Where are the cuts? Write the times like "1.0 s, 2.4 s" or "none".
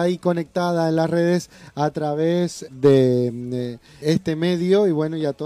2.7 s, 4.0 s